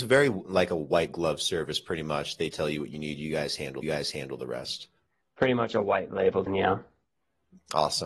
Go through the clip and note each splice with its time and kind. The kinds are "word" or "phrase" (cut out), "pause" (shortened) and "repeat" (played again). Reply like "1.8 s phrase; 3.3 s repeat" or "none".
3.8 s repeat; 6.5 s word